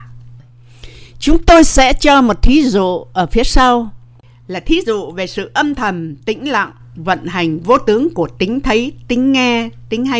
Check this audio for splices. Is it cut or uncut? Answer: uncut